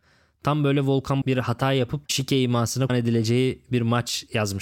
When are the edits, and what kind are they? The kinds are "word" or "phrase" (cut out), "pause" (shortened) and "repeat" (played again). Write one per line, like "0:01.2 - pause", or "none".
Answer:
0:01.2 - word
0:02.1 - word
0:02.9 - word